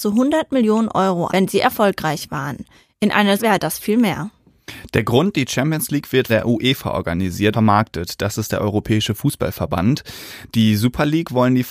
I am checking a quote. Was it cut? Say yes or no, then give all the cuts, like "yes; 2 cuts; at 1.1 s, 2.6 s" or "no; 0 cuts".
yes; 5 cuts; at 1.3 s, 3.4 s, 3.8 s, 6.3 s, 7.5 s